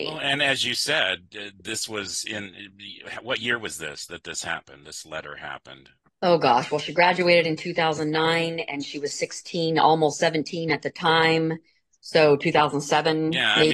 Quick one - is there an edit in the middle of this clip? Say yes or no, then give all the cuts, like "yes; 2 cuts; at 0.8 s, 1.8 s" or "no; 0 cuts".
no; 0 cuts